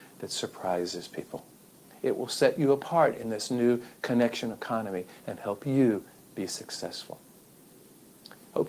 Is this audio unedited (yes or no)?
yes